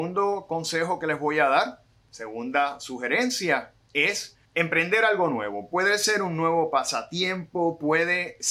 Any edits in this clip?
no; 0 cuts

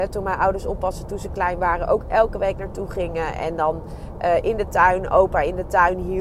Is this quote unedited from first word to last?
yes; 0 cuts

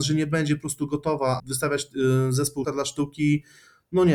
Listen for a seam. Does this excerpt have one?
yes; 2 cuts; at 1.4 s, 2.6 s

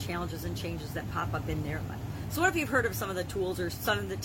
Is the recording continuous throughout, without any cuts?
yes; 0 cuts

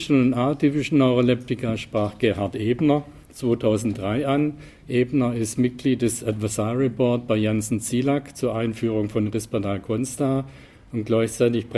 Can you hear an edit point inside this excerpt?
no; 0 cuts

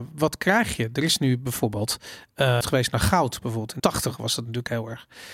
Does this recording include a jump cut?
yes; 2 cuts; at 2.6 s, 3.8 s

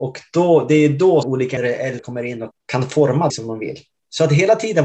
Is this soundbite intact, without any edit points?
no; 5 cuts; at 1.2 s, 1.6 s, 2.0 s, 2.5 s, 3.3 s

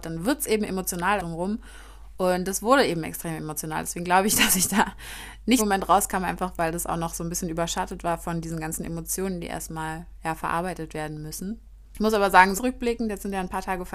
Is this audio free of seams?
no; 3 cuts; at 1.2 s, 5.6 s, 12.5 s

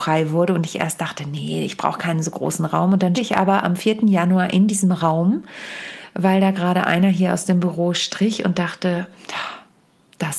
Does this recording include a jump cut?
yes; 1 cut; at 3.1 s

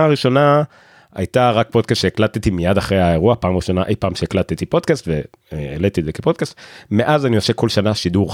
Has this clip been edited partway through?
no; 0 cuts

